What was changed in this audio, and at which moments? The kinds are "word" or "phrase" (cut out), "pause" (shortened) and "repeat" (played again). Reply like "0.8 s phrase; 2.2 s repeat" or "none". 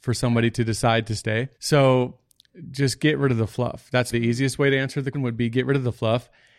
1.5 s pause; 4.1 s word; 5.1 s word